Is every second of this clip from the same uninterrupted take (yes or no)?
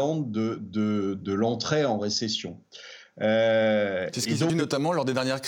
no